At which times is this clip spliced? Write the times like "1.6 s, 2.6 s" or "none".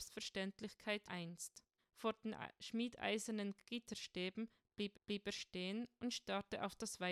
1.1 s, 1.8 s, 4.9 s